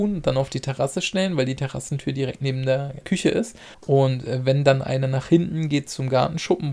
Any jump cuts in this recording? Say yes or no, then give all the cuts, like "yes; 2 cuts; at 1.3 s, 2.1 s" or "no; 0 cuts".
yes; 2 cuts; at 3.0 s, 3.7 s